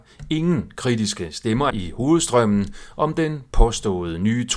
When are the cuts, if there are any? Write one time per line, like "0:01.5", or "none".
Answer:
0:01.7